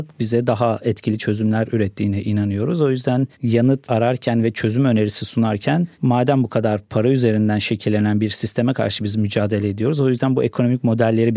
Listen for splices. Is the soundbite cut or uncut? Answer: uncut